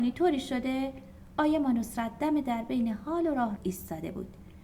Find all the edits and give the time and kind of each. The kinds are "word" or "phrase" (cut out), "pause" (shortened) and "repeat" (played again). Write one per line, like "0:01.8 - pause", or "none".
0:03.6 - word